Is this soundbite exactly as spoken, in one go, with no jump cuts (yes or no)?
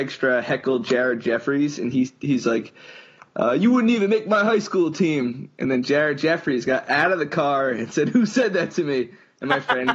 yes